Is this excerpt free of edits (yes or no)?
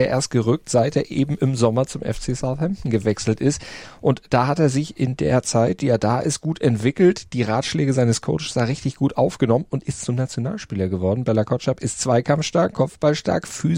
yes